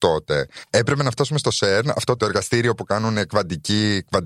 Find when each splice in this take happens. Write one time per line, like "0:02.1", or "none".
0:02.2